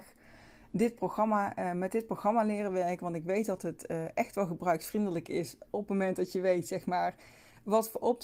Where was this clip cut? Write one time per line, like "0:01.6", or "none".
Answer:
0:05.7